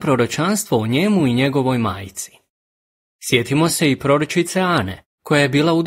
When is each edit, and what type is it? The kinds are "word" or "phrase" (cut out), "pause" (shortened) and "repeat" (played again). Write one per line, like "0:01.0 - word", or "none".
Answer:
none